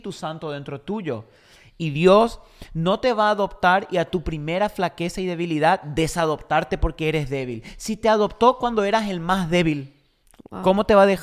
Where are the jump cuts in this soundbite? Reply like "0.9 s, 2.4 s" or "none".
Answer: none